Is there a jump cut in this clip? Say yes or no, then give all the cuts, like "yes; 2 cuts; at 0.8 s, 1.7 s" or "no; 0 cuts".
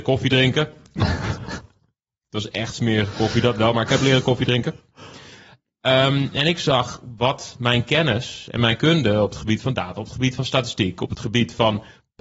no; 0 cuts